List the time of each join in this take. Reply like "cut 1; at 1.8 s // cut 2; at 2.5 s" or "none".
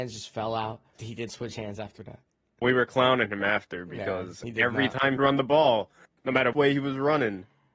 cut 1; at 0.9 s // cut 2; at 1.3 s // cut 3; at 2.6 s // cut 4; at 5.2 s // cut 5; at 6.5 s

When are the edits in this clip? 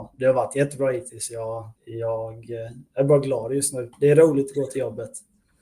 cut 1; at 1.8 s // cut 2; at 3.9 s

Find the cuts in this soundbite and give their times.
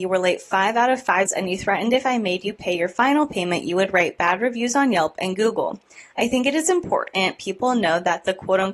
cut 1; at 1.3 s

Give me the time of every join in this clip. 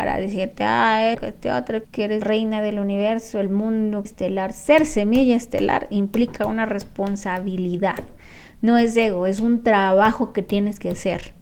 cut 1; at 1.1 s // cut 2; at 1.8 s // cut 3; at 2.2 s // cut 4; at 4.0 s

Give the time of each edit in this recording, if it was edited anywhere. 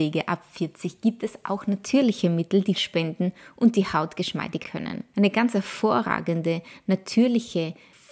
cut 1; at 2.7 s // cut 2; at 4.6 s

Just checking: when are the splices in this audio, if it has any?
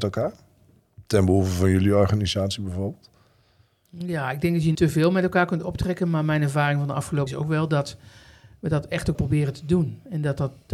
cut 1; at 4.7 s // cut 2; at 7.3 s // cut 3; at 9.1 s

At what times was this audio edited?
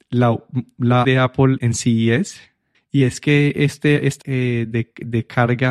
cut 1; at 1.0 s // cut 2; at 1.6 s // cut 3; at 4.2 s

